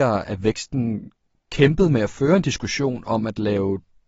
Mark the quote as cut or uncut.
uncut